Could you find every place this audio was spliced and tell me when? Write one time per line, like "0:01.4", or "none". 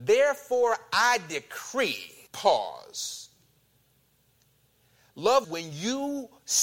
0:02.3
0:05.4